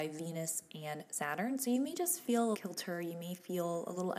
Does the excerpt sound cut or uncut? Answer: cut